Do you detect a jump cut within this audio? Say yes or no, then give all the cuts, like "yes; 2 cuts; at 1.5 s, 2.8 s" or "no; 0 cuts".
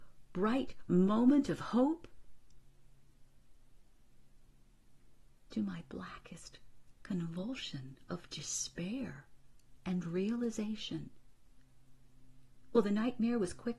no; 0 cuts